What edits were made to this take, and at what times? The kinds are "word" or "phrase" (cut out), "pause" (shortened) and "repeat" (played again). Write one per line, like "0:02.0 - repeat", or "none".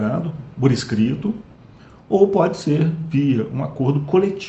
none